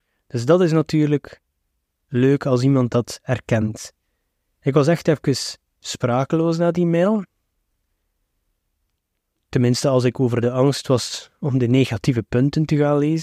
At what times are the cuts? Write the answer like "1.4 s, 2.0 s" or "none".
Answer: none